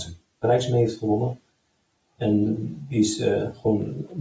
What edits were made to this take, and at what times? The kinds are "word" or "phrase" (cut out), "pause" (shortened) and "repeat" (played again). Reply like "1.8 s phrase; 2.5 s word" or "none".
none

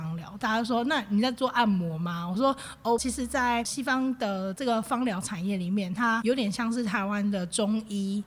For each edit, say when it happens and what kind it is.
3.0 s phrase

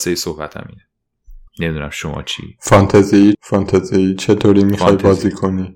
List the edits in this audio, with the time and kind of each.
1.5 s pause; 3.3 s word

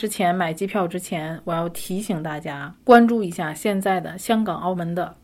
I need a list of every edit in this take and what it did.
2.8 s pause

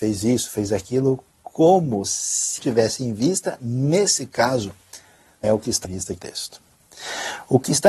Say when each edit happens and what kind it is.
2.6 s word; 5.4 s word; 5.8 s word; 6.2 s word

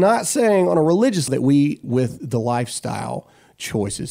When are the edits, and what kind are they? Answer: 1.3 s word; 1.8 s word

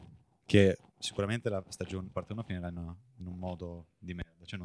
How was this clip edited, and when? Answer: 2.1 s phrase

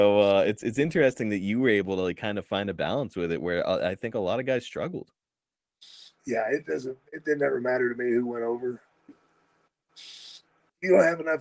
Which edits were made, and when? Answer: none

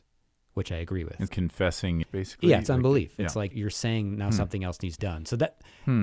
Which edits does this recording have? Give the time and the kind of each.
1.3 s word; 2.0 s phrase; 3.5 s word; 5.0 s word

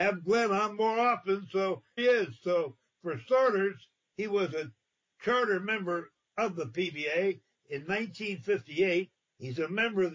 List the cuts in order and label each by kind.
2.0 s word

